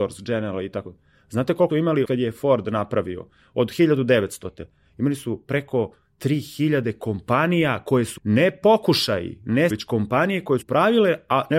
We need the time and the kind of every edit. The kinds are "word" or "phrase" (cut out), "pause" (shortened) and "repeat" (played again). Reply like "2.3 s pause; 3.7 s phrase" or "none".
1.7 s word; 2.0 s word; 8.2 s word; 9.7 s word; 10.6 s word